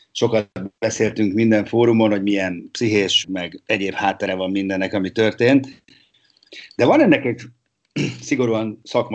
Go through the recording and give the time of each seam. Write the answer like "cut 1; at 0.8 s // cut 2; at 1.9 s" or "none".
cut 1; at 3.2 s